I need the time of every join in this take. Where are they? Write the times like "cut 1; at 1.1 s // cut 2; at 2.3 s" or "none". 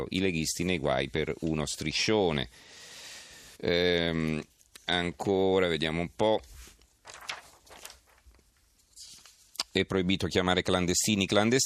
cut 1; at 3.5 s